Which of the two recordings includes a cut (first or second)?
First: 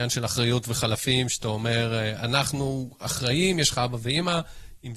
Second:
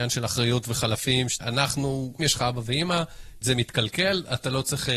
second